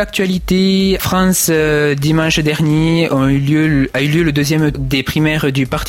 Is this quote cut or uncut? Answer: cut